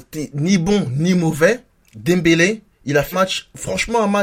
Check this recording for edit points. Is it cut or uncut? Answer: cut